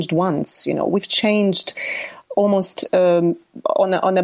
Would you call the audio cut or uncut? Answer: uncut